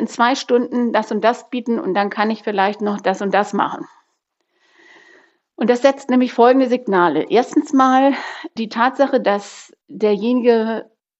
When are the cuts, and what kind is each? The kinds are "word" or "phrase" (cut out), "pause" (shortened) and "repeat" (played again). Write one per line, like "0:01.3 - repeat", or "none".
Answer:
none